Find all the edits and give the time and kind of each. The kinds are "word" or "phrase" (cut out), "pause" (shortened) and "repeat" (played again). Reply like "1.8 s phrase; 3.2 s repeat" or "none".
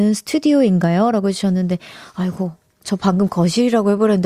none